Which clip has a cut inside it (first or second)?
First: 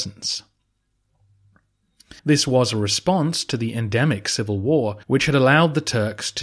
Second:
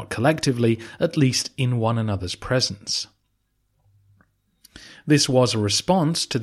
first